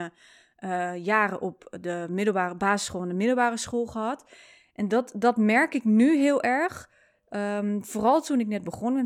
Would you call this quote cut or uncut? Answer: uncut